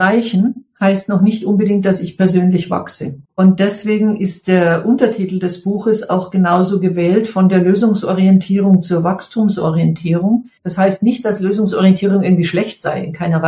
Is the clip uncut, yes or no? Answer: no